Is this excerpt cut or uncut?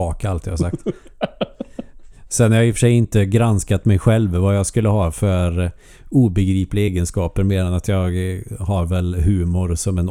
uncut